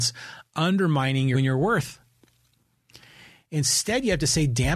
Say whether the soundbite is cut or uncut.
cut